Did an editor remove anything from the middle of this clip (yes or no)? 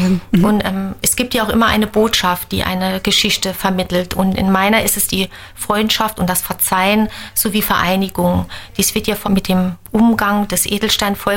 yes